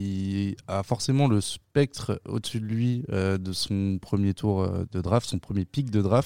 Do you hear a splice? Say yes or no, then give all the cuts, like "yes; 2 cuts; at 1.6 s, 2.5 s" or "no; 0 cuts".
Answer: no; 0 cuts